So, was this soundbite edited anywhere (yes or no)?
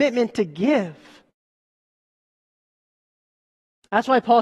no